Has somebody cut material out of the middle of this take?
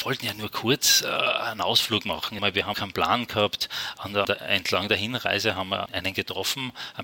yes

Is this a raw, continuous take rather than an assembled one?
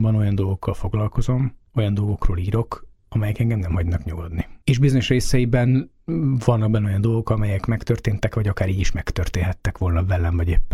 no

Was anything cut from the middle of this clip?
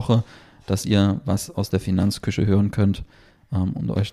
no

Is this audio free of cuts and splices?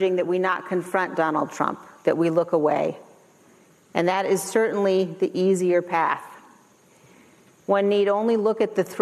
yes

